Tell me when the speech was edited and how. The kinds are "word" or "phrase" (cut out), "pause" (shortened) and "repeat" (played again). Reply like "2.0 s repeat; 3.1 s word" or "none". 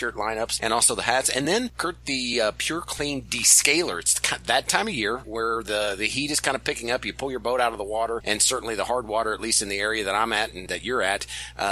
none

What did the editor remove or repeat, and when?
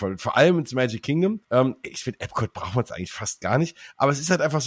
1.4 s pause

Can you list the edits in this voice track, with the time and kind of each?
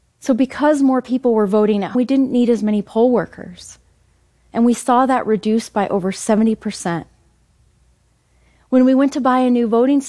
1.9 s word

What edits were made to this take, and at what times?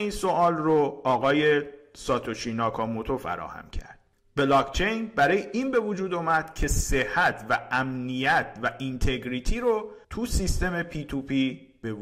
10.0 s pause

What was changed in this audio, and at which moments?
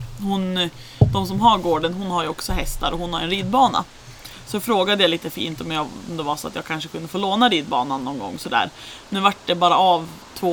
none

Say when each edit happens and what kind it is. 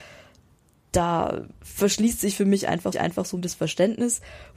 1.5 s pause; 2.9 s repeat; 3.4 s word

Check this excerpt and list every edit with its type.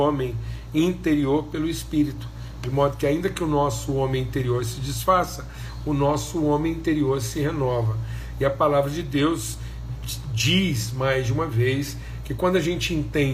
none

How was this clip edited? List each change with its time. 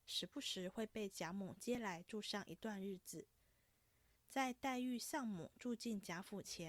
none

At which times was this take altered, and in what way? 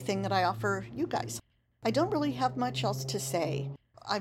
none

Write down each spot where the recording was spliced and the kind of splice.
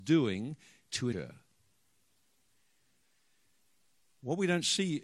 1.1 s word

